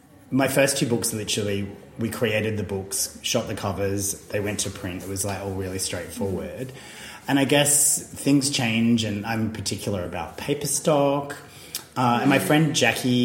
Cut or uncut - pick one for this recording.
uncut